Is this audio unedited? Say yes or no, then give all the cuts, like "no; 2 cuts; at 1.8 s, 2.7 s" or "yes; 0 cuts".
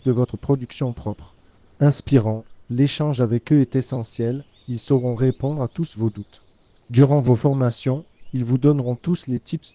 yes; 0 cuts